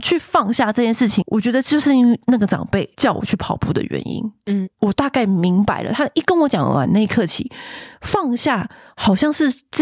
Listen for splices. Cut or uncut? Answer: uncut